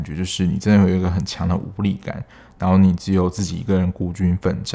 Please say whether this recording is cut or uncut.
uncut